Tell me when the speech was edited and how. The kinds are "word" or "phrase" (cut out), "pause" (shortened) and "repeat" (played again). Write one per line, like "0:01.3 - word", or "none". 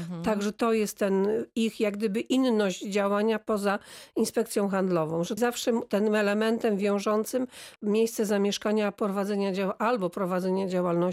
0:05.4 - word
0:07.8 - word

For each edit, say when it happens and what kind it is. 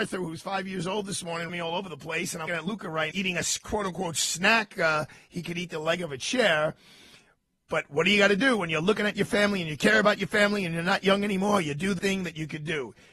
0:01.5 - word
0:02.5 - word
0:03.1 - word
0:04.7 - word
0:12.0 - word

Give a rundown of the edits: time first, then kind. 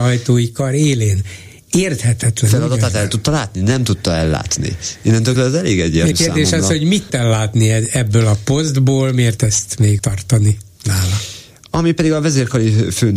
0:05.4 - word
0:06.1 - word
0:07.1 - word
0:09.4 - word
0:10.0 - word

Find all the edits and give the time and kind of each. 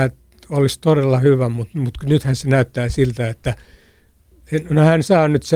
none

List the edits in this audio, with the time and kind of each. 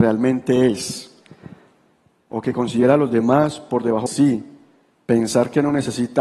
0:04.1 - word

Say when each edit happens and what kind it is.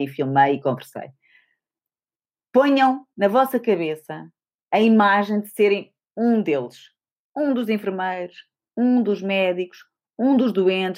none

